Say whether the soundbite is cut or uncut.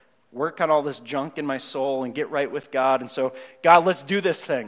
uncut